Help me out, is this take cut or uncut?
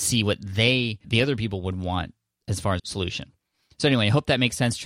cut